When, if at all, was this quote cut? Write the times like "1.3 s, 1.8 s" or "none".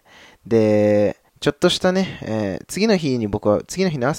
1.3 s

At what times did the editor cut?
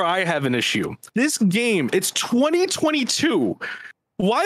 1.1 s

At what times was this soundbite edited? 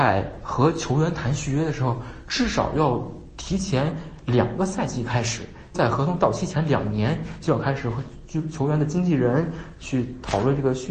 5.7 s

